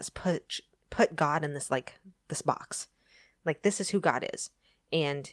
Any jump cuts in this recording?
no; 0 cuts

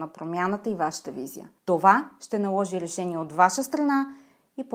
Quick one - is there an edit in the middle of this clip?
yes; 1 cut; at 1.6 s

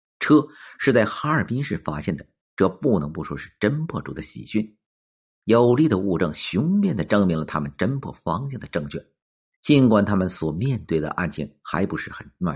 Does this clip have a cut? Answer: no; 0 cuts

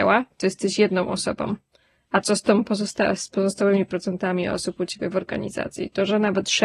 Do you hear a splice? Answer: no; 0 cuts

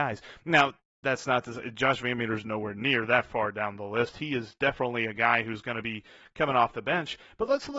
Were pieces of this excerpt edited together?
no; 0 cuts

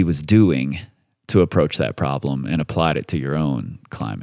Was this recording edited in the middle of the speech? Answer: no; 0 cuts

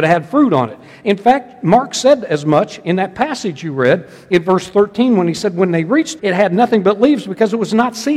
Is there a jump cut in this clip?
yes; 1 cut; at 6.2 s

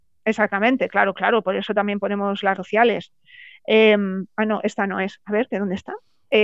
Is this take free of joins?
no; 1 cut; at 2.6 s

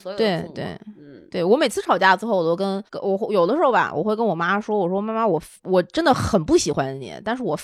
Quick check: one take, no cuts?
no; 2 cuts; at 2.9 s, 5.6 s

